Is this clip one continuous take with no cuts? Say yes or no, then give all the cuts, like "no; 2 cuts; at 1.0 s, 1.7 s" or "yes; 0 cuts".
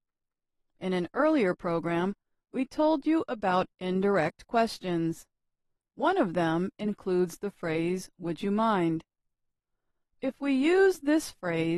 yes; 0 cuts